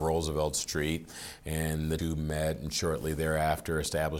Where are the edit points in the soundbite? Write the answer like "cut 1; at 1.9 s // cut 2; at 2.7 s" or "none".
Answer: cut 1; at 2.0 s